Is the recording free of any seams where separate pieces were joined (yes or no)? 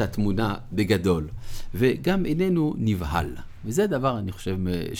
yes